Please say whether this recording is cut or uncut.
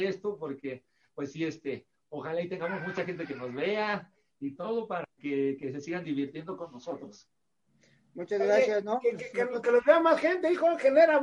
uncut